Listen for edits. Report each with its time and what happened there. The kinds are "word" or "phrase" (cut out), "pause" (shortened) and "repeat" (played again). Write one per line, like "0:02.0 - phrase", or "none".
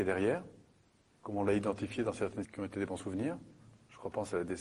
0:02.4 - word